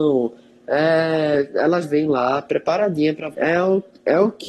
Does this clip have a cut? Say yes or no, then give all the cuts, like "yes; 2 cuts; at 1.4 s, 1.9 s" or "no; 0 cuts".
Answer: yes; 2 cuts; at 1.8 s, 3.3 s